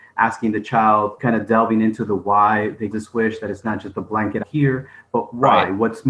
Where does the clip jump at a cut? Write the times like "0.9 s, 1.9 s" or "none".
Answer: 1.2 s, 2.9 s, 4.4 s